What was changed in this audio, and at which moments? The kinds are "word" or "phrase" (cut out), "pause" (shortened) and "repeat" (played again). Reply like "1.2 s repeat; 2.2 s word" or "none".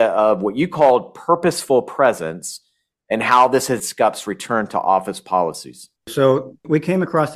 3.8 s word

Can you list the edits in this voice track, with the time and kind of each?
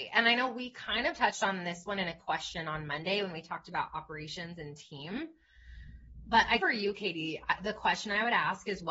6.6 s word

